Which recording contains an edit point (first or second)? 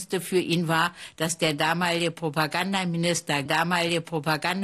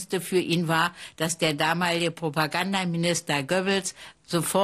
first